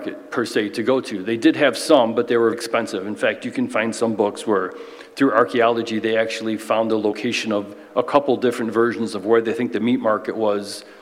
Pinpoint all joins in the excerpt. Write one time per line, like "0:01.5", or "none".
0:02.5